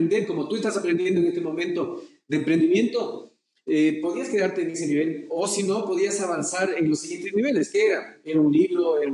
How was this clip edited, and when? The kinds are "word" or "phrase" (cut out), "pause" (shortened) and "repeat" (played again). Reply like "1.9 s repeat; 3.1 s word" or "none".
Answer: none